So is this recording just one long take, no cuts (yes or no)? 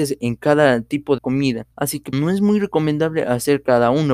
no